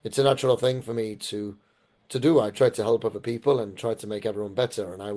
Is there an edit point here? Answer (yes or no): no